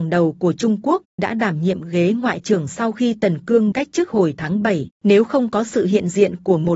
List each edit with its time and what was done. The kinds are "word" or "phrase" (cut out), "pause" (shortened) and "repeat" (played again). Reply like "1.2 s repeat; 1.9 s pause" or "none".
1.2 s word; 3.7 s word; 4.9 s pause